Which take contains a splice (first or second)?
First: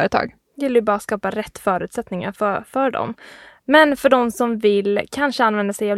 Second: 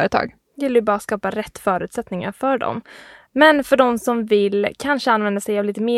second